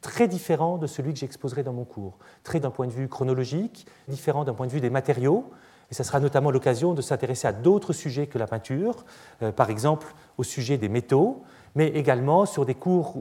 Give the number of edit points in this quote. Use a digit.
3